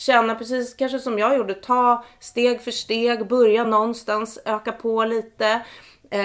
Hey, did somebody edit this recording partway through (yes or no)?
no